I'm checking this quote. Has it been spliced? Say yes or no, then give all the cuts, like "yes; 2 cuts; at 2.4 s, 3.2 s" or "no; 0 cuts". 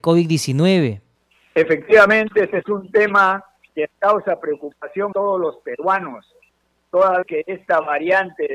yes; 3 cuts; at 3.9 s, 5.1 s, 7.2 s